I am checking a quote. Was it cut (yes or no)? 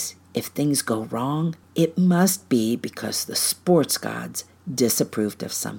yes